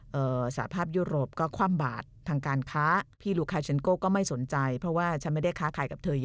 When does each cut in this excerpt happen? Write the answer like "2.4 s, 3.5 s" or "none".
3.1 s